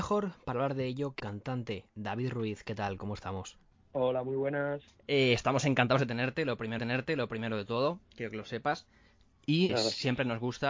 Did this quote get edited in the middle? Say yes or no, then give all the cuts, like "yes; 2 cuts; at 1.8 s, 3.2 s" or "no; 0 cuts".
yes; 5 cuts; at 1.2 s, 5.0 s, 6.8 s, 8.0 s, 9.7 s